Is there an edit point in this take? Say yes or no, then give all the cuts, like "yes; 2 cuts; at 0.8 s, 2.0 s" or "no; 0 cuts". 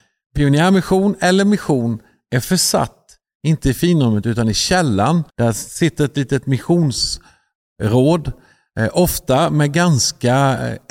yes; 1 cut; at 5.3 s